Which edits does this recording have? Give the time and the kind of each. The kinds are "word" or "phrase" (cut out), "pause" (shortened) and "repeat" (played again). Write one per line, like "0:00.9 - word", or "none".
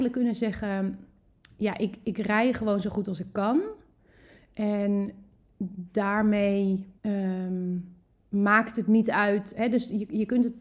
0:07.0 - pause